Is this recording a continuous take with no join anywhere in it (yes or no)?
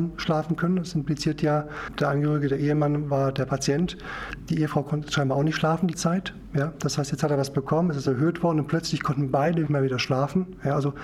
no